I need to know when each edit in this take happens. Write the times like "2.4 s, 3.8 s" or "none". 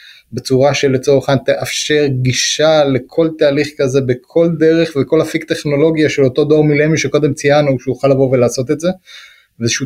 none